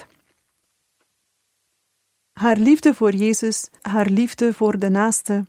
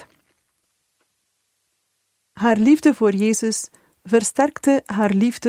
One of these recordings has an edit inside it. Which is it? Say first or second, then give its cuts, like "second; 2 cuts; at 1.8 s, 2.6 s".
first; 1 cut; at 3.8 s